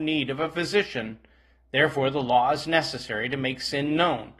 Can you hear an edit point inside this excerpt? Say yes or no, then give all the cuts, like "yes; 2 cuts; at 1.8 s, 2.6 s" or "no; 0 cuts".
no; 0 cuts